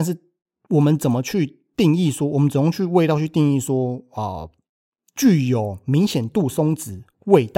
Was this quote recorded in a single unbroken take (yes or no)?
yes